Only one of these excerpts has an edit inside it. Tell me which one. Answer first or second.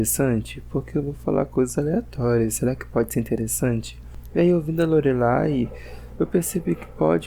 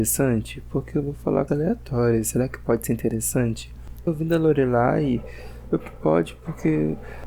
second